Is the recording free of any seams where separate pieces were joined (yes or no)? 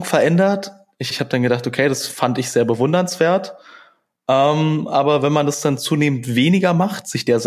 no